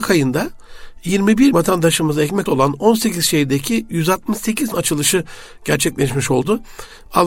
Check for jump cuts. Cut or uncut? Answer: cut